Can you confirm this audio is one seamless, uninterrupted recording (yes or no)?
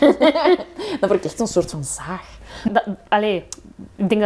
no